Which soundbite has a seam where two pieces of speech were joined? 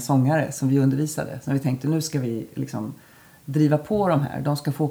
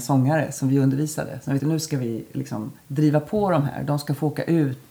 second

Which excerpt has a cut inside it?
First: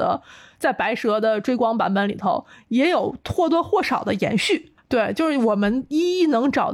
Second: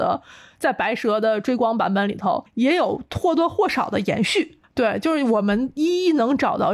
second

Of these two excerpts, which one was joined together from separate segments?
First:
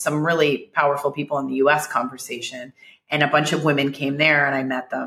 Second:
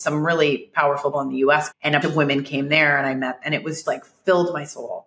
second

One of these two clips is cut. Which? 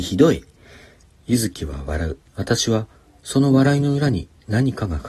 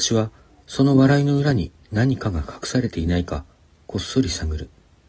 first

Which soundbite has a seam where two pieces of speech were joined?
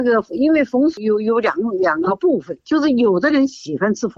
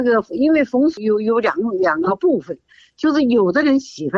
first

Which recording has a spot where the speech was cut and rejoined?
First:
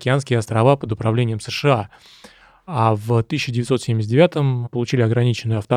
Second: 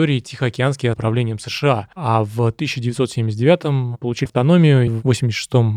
second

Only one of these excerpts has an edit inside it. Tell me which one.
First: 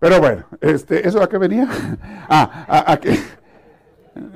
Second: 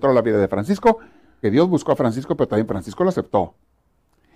second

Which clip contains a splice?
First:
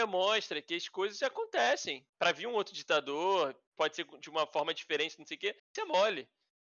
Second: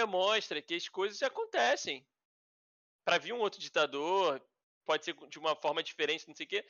first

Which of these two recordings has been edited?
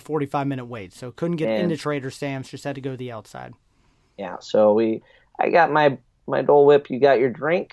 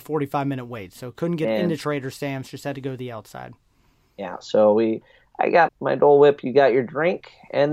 second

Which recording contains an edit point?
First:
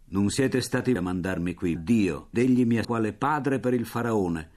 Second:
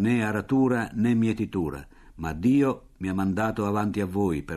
first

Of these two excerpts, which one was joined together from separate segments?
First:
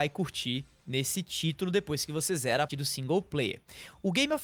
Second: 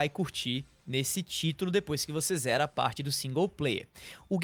first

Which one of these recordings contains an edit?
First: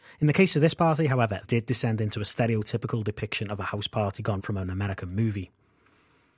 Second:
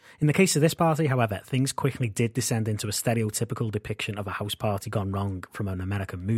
first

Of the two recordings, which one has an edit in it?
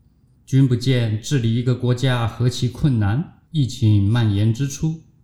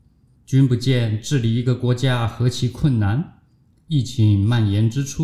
first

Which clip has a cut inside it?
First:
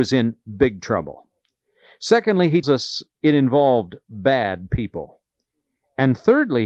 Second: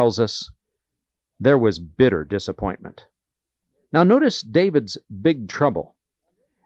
first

